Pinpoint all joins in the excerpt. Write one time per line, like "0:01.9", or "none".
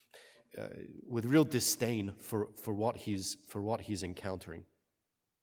none